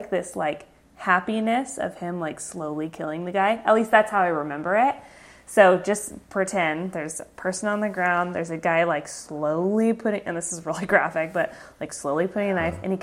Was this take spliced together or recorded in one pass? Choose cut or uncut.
uncut